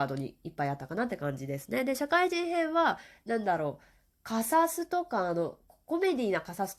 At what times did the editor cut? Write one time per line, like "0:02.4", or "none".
none

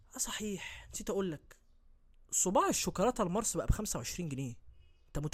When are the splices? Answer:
none

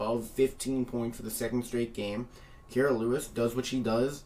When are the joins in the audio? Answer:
none

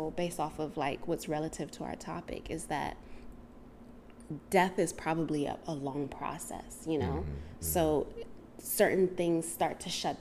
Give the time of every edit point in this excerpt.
none

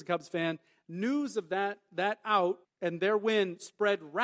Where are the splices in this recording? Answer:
0:02.6

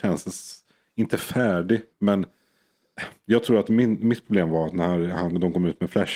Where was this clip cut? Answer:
0:01.9

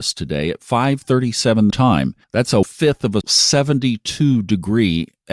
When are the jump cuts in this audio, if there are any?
0:01.7
0:02.2
0:02.6
0:03.2

